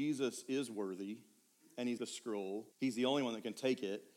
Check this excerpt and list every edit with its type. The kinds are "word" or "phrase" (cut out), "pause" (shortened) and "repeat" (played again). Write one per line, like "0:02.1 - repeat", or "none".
0:02.0 - phrase
0:02.7 - pause